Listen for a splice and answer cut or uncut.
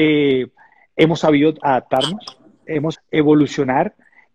cut